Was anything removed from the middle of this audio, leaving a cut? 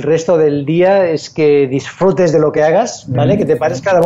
no; 0 cuts

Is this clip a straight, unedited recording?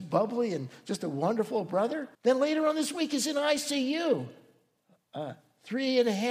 no; 1 cut; at 2.1 s

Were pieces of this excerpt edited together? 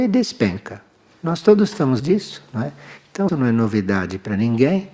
yes; 2 cuts; at 2.0 s, 3.3 s

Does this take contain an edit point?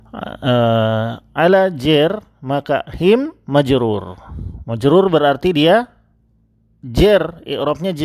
no; 0 cuts

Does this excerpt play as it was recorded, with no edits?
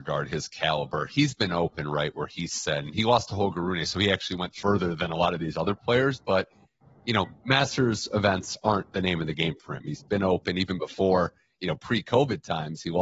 yes; 0 cuts

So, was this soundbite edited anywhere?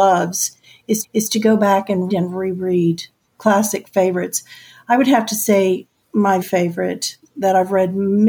yes; 3 cuts; at 1.0 s, 2.1 s, 6.4 s

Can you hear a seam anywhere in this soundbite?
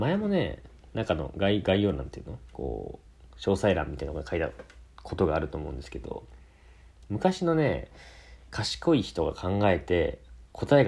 no; 0 cuts

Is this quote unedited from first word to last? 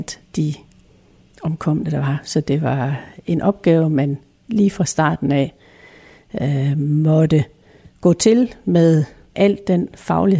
yes; 0 cuts

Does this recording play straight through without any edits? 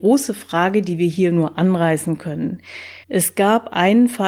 no; 1 cut; at 3.0 s

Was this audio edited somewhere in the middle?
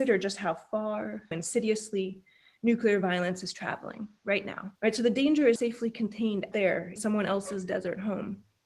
yes; 5 cuts; at 1.3 s, 4.8 s, 5.6 s, 6.5 s, 7.0 s

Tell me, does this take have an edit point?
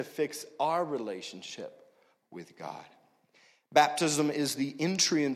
no; 0 cuts

